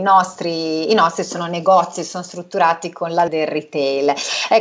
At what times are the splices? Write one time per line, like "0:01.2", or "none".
0:03.3